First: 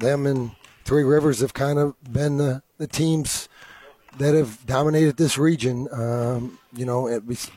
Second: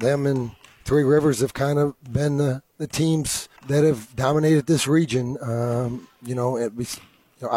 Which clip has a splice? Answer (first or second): second